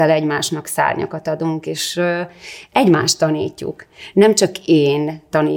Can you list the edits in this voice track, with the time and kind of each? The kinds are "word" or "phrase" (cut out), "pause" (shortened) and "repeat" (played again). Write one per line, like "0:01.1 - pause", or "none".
none